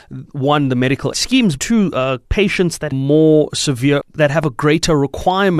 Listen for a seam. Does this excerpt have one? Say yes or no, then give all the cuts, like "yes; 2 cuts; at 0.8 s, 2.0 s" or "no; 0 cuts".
yes; 5 cuts; at 1.1 s, 1.6 s, 2.2 s, 2.9 s, 4.0 s